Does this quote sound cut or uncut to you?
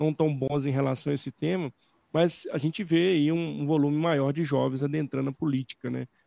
uncut